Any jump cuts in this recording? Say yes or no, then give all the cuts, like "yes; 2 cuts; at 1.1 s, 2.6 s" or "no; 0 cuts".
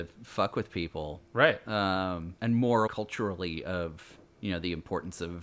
yes; 3 cuts; at 2.4 s, 2.9 s, 4.3 s